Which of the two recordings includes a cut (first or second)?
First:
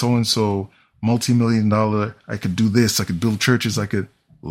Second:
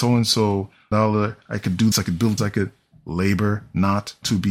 second